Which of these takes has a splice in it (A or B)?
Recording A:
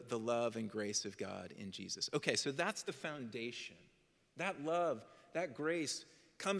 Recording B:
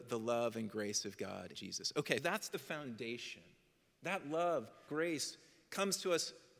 B